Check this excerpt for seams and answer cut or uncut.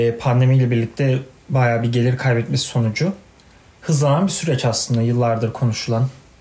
uncut